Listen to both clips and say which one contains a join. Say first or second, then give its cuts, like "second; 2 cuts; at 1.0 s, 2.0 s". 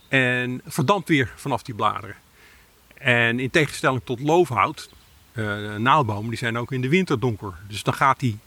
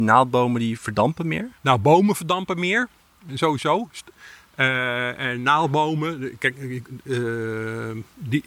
second; 1 cut; at 1.6 s